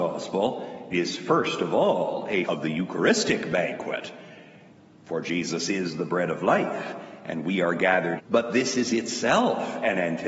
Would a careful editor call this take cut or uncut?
cut